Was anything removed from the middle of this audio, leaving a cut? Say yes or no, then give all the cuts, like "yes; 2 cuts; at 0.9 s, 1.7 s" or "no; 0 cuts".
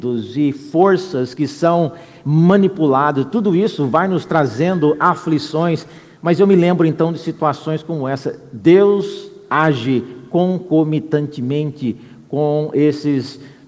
no; 0 cuts